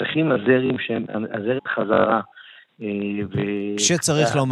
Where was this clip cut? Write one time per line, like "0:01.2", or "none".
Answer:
0:01.6